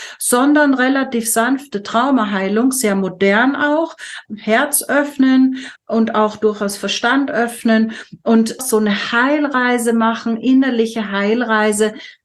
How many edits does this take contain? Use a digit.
3